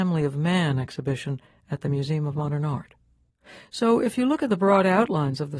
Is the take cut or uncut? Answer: uncut